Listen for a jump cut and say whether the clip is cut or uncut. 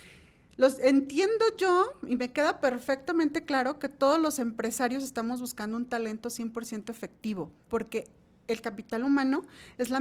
uncut